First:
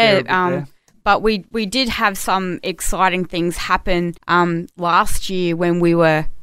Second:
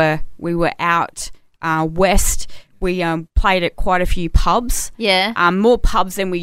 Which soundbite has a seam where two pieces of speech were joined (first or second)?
first